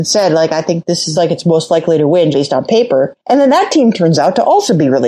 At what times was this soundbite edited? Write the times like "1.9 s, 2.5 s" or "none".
1.2 s, 2.3 s

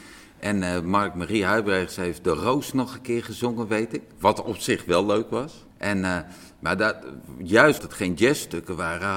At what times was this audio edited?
5.7 s, 7.8 s

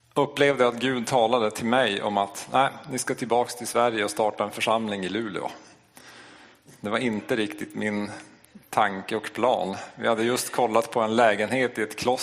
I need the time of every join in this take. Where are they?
none

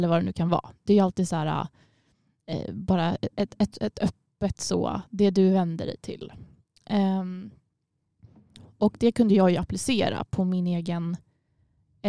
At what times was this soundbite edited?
none

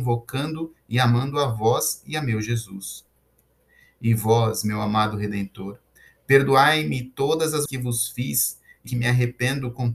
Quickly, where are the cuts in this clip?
7.7 s, 8.9 s

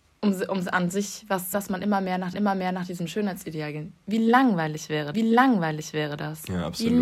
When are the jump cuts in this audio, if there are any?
1.5 s, 2.3 s, 5.1 s

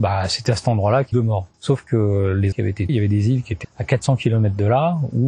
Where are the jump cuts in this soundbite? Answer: 1.1 s, 1.5 s, 2.5 s, 2.9 s, 3.6 s

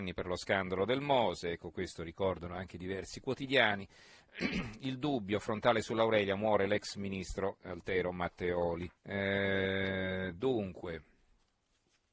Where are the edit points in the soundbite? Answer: 9.0 s

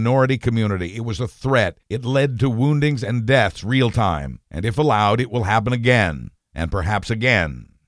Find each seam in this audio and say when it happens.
1.8 s, 4.4 s, 6.4 s

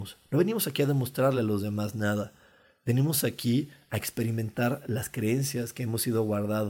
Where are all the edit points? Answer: none

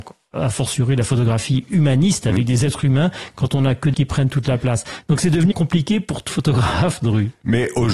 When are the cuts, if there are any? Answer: 3.9 s, 5.5 s, 6.3 s, 7.0 s

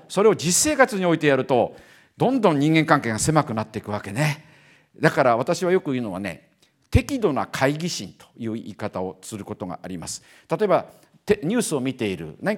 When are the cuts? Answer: none

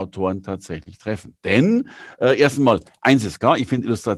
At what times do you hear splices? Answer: none

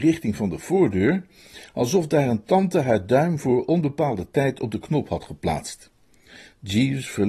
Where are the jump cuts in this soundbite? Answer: none

